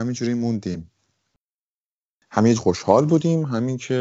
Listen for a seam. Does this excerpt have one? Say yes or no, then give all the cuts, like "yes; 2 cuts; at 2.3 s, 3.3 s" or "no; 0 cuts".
yes; 1 cut; at 2.6 s